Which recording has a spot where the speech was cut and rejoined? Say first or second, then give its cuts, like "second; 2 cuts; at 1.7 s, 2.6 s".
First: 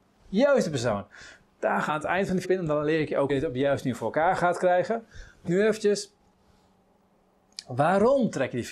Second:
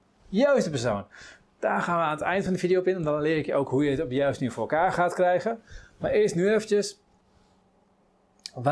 first; 4 cuts; at 1.9 s, 2.4 s, 3.3 s, 5.5 s